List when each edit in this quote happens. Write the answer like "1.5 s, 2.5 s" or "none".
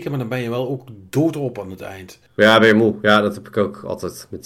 2.3 s